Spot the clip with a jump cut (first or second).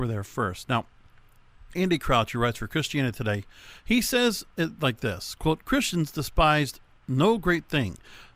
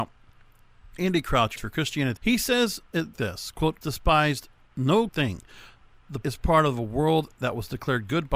second